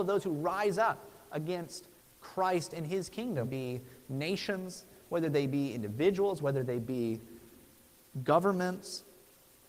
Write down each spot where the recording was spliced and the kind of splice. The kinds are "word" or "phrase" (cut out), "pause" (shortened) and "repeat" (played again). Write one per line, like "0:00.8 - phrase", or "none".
0:02.0 - pause
0:03.4 - phrase